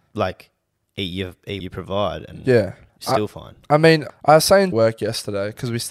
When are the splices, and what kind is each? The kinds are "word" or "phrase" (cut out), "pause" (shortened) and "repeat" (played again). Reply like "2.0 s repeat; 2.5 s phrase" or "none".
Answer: 1.6 s word; 2.9 s pause; 4.1 s word; 4.7 s phrase